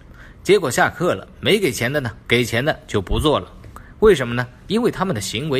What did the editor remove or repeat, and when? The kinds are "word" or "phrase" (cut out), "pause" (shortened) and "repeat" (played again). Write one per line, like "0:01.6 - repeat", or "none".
0:02.2 - phrase